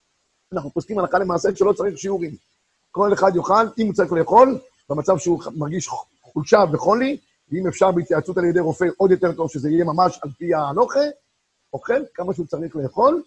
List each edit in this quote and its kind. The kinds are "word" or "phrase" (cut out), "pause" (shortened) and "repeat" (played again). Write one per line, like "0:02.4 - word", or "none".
none